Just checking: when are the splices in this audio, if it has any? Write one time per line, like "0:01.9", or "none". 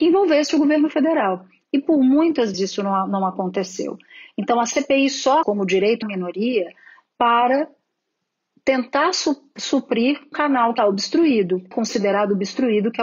0:02.5
0:05.4
0:06.0
0:10.3
0:10.8
0:11.7